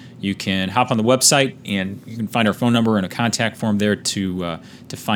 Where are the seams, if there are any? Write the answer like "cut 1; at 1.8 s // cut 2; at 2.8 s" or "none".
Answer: none